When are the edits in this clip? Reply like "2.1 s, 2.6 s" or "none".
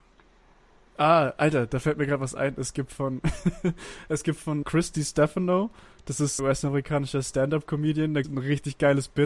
4.6 s, 6.4 s, 8.2 s